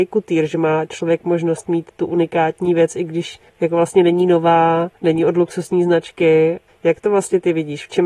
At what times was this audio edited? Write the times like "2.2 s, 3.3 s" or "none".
3.5 s, 5.0 s, 6.7 s